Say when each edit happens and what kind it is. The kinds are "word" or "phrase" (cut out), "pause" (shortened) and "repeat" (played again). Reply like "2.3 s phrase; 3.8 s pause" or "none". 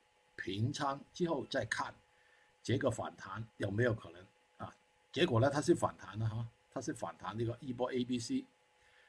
3.5 s pause

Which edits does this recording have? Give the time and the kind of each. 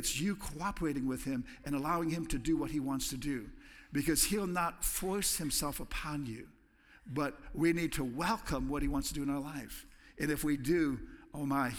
none

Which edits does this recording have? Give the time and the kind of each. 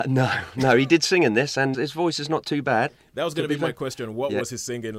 1.7 s word

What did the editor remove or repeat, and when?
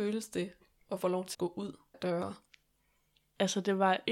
1.0 s word; 1.3 s word; 1.9 s phrase

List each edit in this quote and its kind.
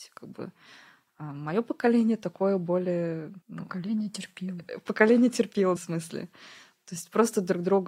3.4 s pause; 5.8 s phrase

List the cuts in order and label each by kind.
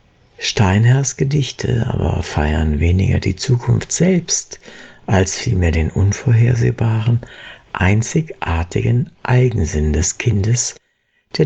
none

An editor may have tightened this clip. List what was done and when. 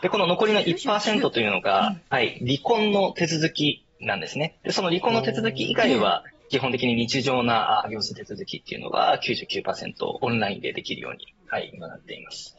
2.1 s pause

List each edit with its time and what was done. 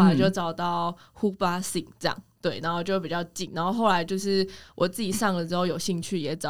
none

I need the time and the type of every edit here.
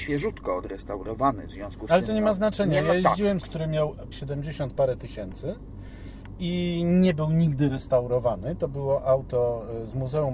3.4 s word; 4.1 s word

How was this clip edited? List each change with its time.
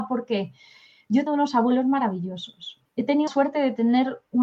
1.3 s word; 2.8 s pause; 3.3 s word

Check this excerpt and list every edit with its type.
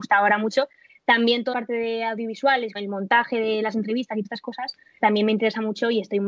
1.5 s word; 2.7 s phrase; 4.2 s word; 5.0 s word

